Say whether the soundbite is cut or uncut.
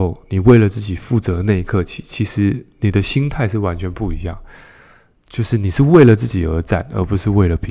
uncut